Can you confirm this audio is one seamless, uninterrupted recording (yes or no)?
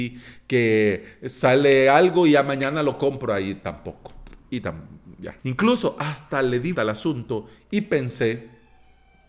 no